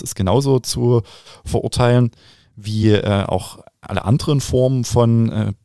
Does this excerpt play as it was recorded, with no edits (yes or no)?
yes